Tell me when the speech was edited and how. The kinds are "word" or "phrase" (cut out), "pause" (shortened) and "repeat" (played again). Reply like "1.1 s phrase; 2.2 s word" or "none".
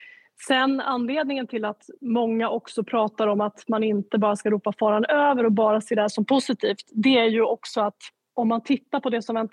none